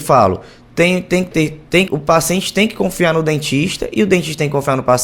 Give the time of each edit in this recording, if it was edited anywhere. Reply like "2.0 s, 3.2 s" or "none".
1.9 s